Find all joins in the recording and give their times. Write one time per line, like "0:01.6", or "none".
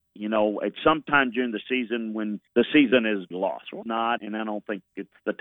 0:02.5
0:03.3
0:03.8
0:04.2

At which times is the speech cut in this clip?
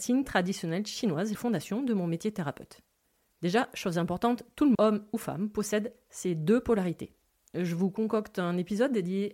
0:01.3
0:04.7

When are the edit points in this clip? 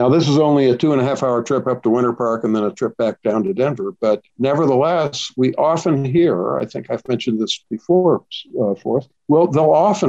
0:04.3
0:09.2

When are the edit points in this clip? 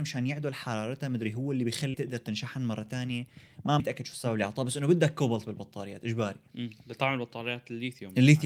0:01.9
0:03.8

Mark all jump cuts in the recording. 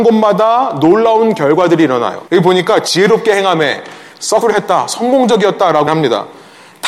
0:02.3
0:04.4
0:05.9

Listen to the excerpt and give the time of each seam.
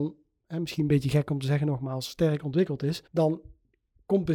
0:03.1

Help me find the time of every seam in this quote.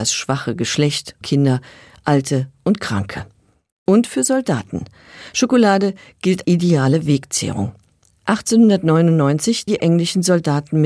0:01.2
0:06.4
0:09.7

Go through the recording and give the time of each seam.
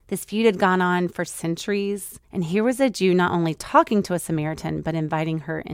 0:02.2

